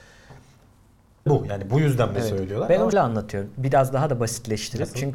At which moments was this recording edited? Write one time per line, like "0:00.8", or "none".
0:01.3
0:02.1
0:02.9